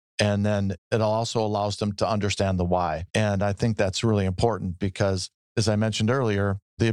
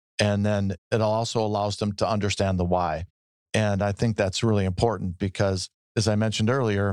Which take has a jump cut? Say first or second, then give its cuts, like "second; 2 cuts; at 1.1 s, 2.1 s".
first; 1 cut; at 3.1 s